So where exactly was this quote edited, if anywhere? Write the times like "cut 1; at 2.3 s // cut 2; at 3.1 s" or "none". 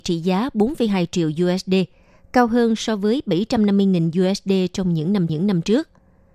cut 1; at 5.3 s